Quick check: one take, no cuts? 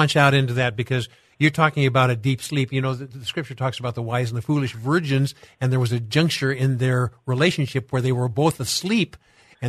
yes; 0 cuts

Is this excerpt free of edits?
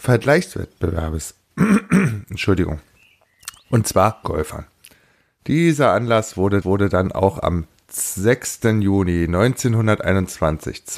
no; 2 cuts; at 4.2 s, 6.6 s

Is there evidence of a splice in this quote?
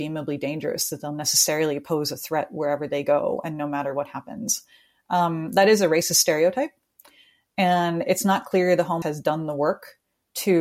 yes; 1 cut; at 9.0 s

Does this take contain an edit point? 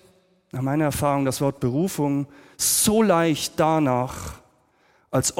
no; 0 cuts

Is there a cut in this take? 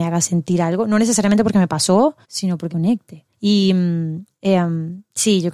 yes; 3 cuts; at 2.2 s, 2.7 s, 3.3 s

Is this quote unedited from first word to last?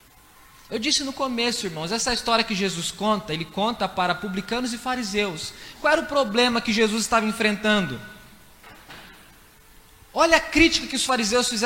yes; 0 cuts

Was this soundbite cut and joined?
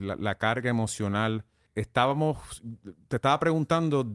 yes; 1 cut; at 1.7 s

